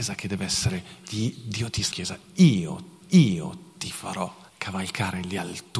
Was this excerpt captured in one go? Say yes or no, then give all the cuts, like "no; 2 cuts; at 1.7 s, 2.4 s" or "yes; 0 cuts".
no; 3 cuts; at 1.9 s, 3.0 s, 4.5 s